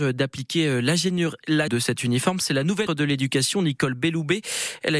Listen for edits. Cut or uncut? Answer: cut